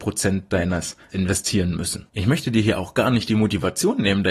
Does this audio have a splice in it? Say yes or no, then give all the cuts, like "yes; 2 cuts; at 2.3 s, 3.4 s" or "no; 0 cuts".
yes; 2 cuts; at 1.1 s, 2.1 s